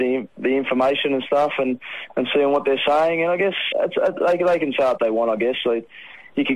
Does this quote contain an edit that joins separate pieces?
yes; 1 cut; at 3.7 s

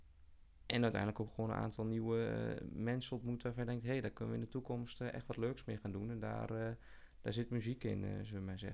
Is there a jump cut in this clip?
no; 0 cuts

